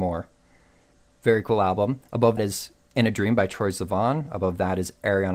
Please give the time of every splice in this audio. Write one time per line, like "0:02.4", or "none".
0:02.4